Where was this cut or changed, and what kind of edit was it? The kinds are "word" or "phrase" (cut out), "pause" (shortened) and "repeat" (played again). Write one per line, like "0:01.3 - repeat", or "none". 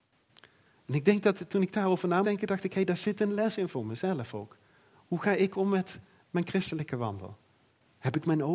0:02.2 - word